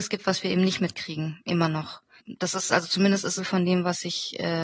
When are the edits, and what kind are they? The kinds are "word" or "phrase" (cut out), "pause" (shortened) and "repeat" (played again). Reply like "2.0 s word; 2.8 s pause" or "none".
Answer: 3.4 s phrase